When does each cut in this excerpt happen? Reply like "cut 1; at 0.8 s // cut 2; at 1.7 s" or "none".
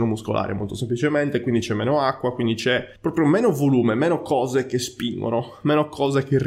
cut 1; at 3.0 s